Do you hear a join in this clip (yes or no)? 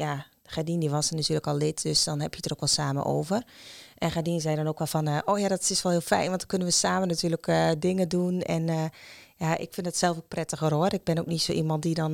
no